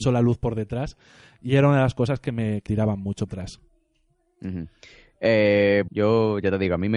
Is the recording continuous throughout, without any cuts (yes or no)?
no